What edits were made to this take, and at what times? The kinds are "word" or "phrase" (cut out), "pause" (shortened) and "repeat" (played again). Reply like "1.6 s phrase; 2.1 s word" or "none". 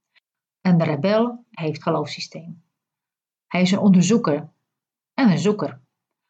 1.8 s word

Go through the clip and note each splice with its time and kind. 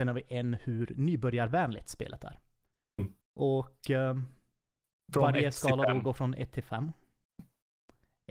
3.2 s pause

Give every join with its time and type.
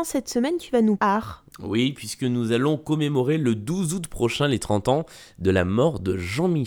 1.0 s word

